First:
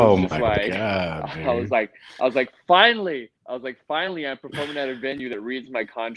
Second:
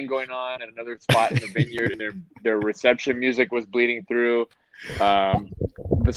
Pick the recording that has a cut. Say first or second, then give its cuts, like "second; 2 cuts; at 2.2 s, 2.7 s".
first; 1 cut; at 3.4 s